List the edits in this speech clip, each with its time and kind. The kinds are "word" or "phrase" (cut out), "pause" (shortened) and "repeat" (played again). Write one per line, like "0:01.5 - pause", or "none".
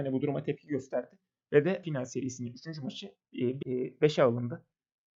0:01.8 - word
0:03.6 - word